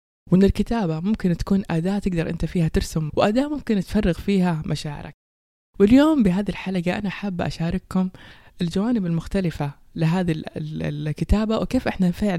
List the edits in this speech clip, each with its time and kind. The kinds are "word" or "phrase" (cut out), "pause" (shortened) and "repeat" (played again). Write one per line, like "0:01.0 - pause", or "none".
0:03.1 - word